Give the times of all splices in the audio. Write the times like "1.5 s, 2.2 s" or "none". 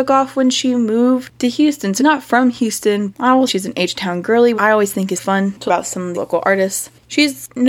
2.0 s, 3.1 s, 3.5 s, 4.5 s, 5.2 s, 5.7 s, 6.1 s